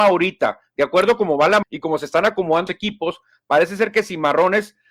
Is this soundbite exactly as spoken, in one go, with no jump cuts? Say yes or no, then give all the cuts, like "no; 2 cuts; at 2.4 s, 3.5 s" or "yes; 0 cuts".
no; 2 cuts; at 1.6 s, 2.7 s